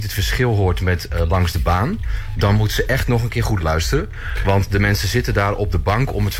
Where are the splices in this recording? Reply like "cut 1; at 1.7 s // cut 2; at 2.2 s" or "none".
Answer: none

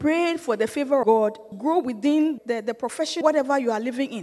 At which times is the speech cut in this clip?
cut 1; at 1.0 s // cut 2; at 1.5 s // cut 3; at 2.4 s // cut 4; at 3.2 s

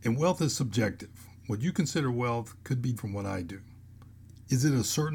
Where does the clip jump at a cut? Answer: cut 1; at 3.0 s

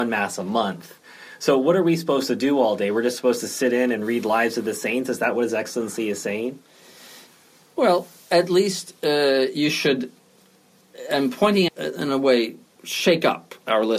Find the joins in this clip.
cut 1; at 11.7 s

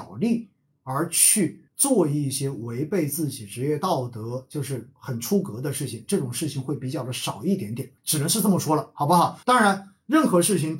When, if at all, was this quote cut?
cut 1; at 1.7 s // cut 2; at 8.0 s // cut 3; at 9.4 s

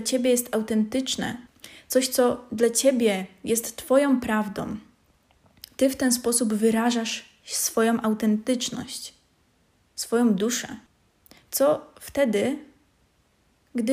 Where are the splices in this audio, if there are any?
none

